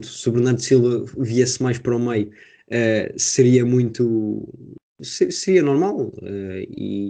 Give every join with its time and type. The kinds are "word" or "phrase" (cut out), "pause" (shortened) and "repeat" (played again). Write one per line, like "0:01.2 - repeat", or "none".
none